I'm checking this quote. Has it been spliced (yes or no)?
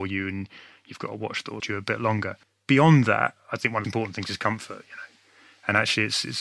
yes